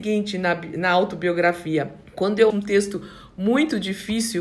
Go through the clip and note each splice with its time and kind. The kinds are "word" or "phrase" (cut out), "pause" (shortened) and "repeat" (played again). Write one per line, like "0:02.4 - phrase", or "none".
0:02.1 - pause
0:02.5 - word